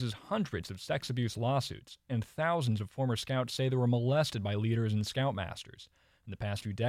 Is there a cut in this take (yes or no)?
no